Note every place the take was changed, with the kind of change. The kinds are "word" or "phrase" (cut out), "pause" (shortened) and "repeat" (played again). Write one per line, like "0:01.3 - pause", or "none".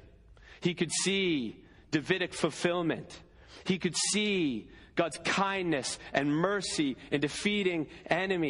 none

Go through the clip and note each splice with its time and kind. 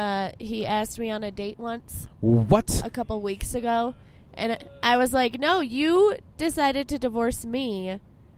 none

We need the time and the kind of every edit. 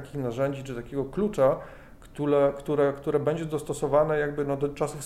none

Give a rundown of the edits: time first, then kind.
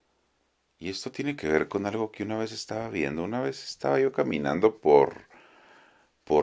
none

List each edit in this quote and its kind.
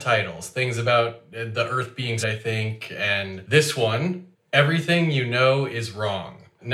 0:02.2 - word

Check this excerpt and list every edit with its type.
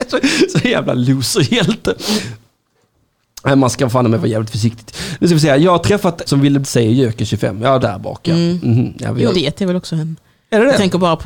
0:06.3 - word
0:06.6 - phrase
0:07.8 - phrase
0:09.3 - word

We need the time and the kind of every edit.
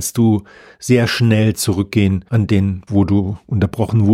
0:02.3 - pause
0:02.9 - word

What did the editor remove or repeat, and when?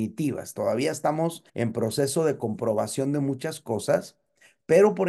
0:01.5 - pause

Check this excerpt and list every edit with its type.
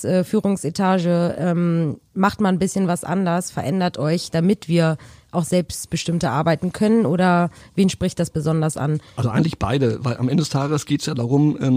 none

